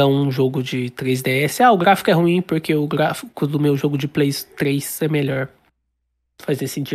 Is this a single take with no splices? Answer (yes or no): yes